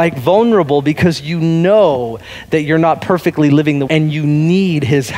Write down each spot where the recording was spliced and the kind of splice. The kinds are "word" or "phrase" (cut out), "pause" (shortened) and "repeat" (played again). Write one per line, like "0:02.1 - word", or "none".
0:03.9 - word